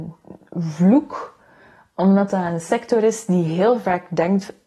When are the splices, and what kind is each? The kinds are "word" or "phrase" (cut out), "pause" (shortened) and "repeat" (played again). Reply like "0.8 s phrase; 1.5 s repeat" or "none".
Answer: none